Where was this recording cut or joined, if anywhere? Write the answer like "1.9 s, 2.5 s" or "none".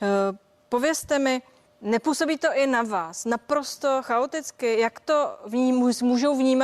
1.7 s